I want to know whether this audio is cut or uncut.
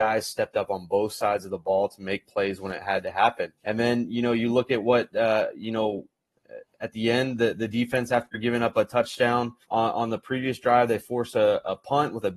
cut